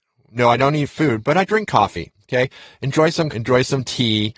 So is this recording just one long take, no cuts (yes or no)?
no